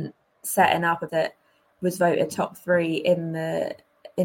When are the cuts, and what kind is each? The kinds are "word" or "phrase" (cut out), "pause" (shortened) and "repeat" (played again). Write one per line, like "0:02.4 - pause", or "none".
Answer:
0:01.1 - word